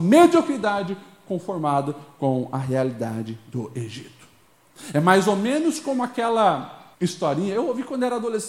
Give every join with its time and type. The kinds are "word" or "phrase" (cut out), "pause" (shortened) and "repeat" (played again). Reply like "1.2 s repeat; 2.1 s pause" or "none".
6.9 s pause

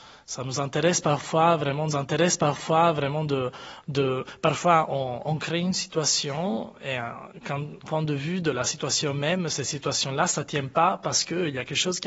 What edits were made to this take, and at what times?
1.9 s repeat; 7.8 s phrase

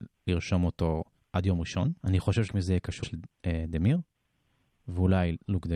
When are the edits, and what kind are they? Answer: 1.2 s pause; 2.0 s pause; 2.5 s word; 3.0 s word

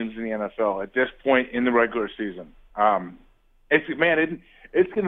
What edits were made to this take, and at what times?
none

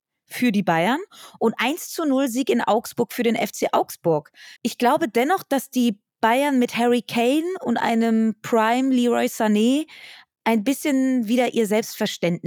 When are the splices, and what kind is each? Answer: 4.6 s pause

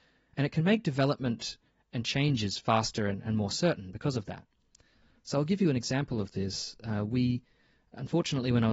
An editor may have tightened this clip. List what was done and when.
none

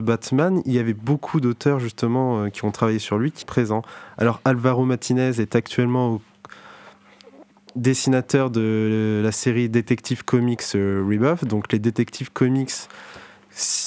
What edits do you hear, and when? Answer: 3.4 s word

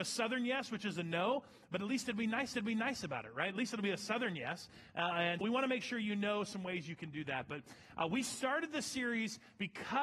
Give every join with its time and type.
2.5 s repeat; 5.4 s word

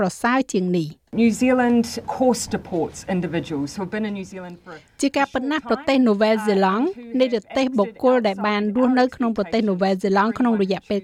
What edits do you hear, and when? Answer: 1.1 s pause; 2.0 s word

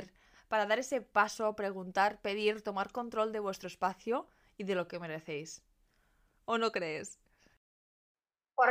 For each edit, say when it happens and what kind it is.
none

